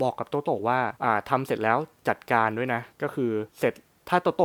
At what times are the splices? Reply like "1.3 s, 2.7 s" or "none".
1.0 s, 2.9 s, 3.5 s